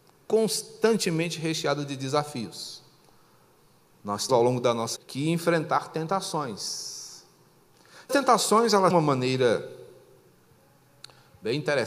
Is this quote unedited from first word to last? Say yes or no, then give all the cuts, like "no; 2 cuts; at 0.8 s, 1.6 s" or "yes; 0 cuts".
no; 4 cuts; at 4.3 s, 5.0 s, 8.1 s, 8.9 s